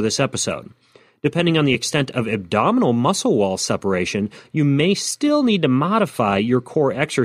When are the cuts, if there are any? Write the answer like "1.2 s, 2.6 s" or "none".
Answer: none